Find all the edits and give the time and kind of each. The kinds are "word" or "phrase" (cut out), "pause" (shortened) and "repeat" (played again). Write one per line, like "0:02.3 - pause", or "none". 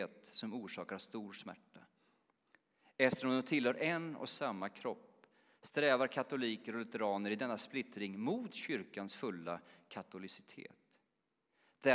none